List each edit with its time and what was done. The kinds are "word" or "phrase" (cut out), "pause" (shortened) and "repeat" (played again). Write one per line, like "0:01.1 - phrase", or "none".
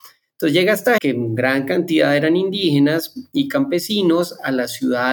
0:01.0 - word